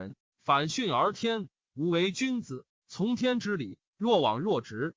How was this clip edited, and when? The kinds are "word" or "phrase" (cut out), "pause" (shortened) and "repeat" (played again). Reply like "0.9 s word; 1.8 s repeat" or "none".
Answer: 3.9 s pause